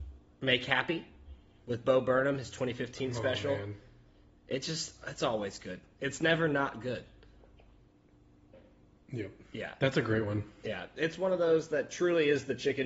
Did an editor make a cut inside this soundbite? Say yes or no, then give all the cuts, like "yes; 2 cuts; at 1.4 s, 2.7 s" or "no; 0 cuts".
no; 0 cuts